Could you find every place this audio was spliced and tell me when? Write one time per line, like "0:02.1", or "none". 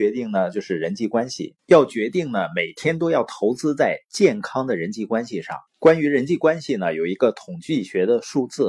0:01.6
0:05.7